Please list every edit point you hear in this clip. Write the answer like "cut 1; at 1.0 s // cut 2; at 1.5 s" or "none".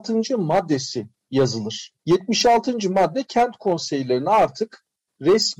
cut 1; at 2.0 s